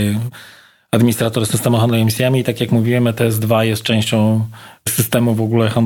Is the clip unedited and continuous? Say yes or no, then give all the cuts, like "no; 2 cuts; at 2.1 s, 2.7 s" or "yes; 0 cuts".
yes; 0 cuts